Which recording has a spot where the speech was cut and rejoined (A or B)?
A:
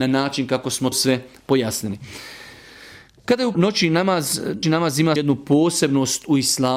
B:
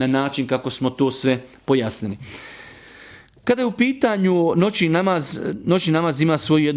A